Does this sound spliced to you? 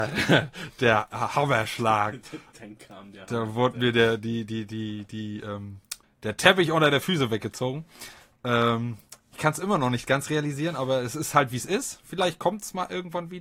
yes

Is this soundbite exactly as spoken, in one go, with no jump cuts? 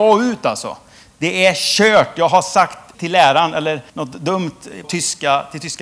no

